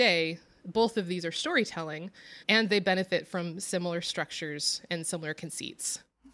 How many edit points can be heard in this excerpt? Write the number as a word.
one